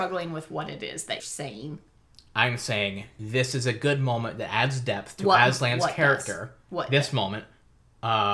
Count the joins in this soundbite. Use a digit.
1